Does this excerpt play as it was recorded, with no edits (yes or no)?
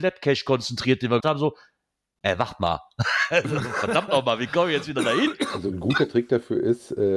no